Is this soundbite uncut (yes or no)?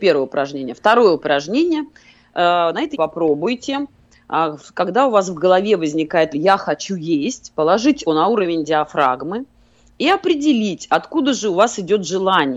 no